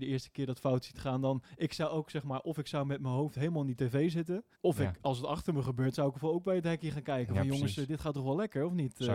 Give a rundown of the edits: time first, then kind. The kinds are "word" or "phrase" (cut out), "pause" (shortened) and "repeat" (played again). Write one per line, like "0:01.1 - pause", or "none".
0:04.5 - pause

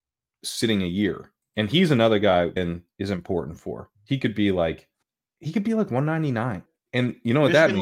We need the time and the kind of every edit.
0:02.6 - word
0:03.9 - pause
0:05.0 - pause
0:06.8 - pause

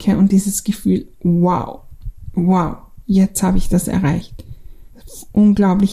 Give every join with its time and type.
0:04.9 - pause

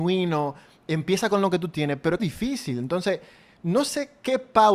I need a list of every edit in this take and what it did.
0:02.2 - word

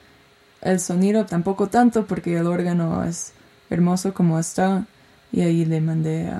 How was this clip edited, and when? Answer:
0:01.3 - word

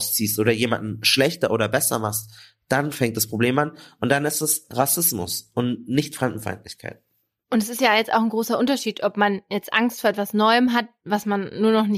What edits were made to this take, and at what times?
none

